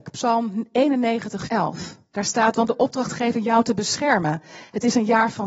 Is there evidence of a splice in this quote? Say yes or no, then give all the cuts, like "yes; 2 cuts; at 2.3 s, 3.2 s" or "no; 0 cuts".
yes; 2 cuts; at 1.5 s, 2.7 s